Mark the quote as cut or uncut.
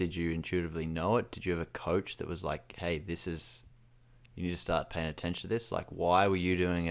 uncut